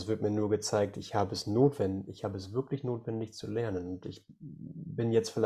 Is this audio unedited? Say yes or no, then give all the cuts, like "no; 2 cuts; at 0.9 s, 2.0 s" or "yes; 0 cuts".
yes; 0 cuts